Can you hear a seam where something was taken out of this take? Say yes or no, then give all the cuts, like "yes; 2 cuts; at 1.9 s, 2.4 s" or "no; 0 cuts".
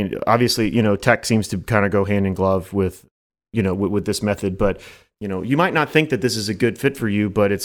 no; 0 cuts